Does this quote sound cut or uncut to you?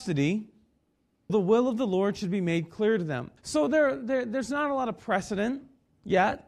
cut